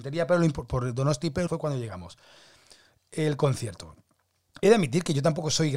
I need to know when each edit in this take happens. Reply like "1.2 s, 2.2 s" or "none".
1.5 s